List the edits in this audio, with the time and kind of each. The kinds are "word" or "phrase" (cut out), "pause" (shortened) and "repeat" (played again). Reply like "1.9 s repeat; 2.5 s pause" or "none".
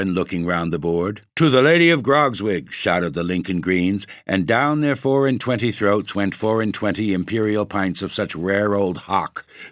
1.3 s pause